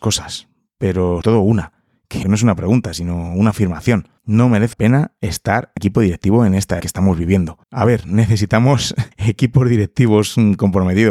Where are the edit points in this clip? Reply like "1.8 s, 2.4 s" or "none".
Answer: 1.2 s, 2.2 s, 4.2 s, 4.7 s, 5.8 s, 6.8 s, 7.6 s, 9.1 s

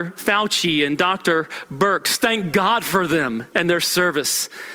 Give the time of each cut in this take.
none

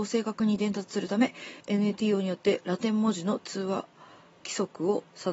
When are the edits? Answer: 1.6 s

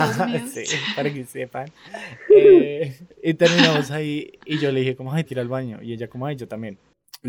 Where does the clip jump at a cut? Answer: 5.3 s

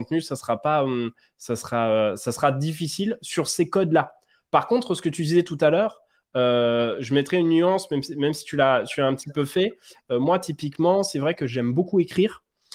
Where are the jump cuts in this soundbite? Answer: none

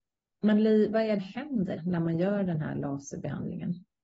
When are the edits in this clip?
1.2 s, 1.8 s

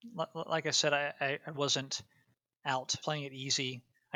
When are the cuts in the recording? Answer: 1.5 s, 3.0 s

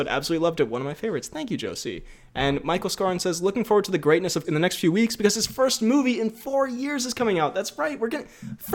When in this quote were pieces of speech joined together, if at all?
4.4 s

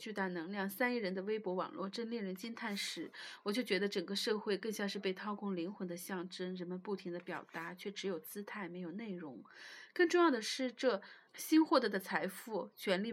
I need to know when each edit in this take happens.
11.3 s

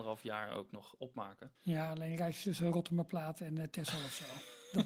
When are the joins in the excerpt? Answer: 1.6 s

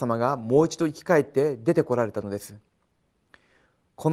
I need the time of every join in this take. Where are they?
none

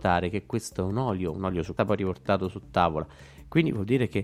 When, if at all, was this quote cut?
1.8 s

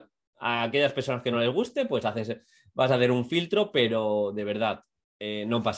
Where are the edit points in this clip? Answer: none

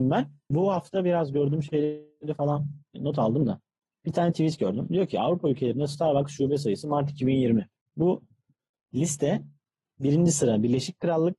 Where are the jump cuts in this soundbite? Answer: none

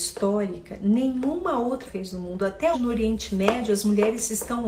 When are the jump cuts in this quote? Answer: 1.8 s, 2.7 s

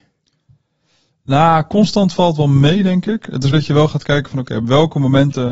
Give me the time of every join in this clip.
3.5 s

